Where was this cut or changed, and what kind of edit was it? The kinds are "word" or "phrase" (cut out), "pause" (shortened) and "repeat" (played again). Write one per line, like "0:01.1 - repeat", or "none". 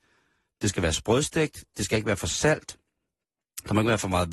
none